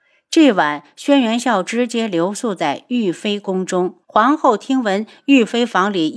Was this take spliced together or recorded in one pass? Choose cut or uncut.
cut